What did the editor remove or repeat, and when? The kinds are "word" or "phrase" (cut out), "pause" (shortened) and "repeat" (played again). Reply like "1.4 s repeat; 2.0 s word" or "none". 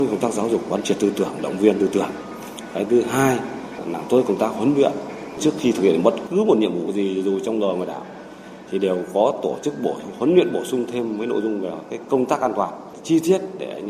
none